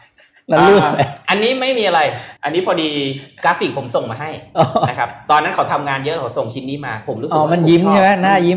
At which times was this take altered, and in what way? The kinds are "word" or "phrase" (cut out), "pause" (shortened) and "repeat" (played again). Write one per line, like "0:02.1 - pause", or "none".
0:02.4 - pause